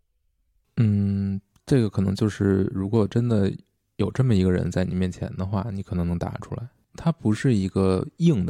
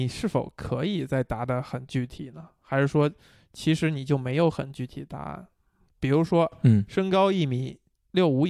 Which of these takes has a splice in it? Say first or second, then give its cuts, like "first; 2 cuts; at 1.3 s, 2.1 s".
first; 1 cut; at 6.7 s